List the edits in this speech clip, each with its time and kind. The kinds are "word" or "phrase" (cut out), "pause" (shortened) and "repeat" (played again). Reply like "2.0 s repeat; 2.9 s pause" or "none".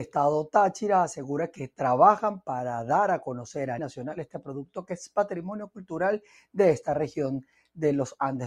3.8 s word